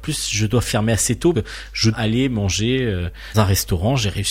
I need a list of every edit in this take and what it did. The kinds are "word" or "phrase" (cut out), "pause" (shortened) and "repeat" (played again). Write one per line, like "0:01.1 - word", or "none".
0:01.3 - word
0:01.9 - word
0:03.3 - word